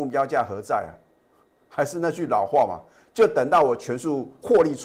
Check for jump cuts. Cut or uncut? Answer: uncut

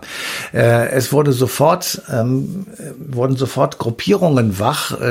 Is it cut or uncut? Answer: uncut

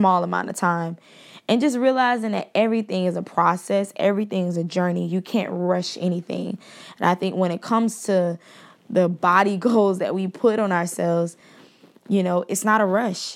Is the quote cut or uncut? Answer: uncut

